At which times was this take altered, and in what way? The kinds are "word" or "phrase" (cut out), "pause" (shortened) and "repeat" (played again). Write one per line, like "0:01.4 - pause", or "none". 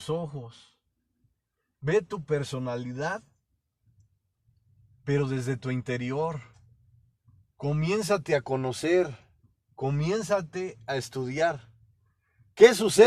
none